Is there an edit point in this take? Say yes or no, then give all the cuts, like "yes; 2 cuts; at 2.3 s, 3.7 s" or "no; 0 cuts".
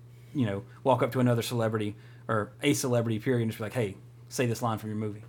no; 0 cuts